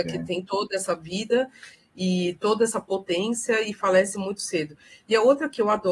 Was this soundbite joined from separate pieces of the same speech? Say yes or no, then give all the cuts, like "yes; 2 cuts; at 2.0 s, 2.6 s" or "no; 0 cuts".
no; 0 cuts